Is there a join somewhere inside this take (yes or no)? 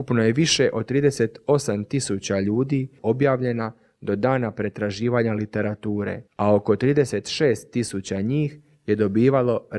yes